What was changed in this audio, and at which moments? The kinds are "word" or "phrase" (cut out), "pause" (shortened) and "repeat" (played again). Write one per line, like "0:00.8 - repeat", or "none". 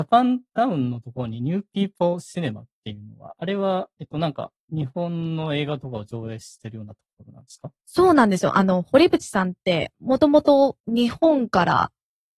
0:10.8 - pause